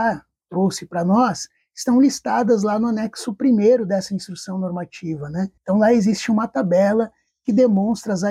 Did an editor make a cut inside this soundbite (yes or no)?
yes